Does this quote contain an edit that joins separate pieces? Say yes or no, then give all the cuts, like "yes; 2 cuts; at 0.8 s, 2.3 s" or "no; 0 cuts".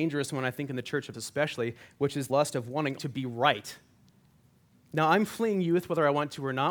yes; 4 cuts; at 1.1 s, 2.3 s, 3.0 s, 4.2 s